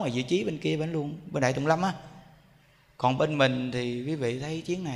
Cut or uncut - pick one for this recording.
uncut